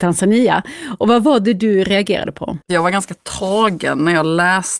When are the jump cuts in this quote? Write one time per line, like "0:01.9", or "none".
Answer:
0:02.6